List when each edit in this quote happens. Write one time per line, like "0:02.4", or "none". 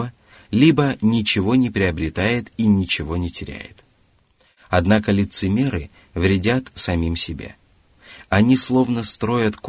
none